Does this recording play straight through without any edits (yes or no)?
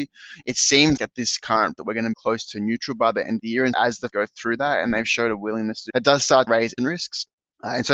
no